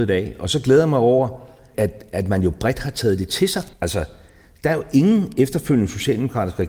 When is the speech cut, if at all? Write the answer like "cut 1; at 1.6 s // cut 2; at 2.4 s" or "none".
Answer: cut 1; at 1.7 s // cut 2; at 3.7 s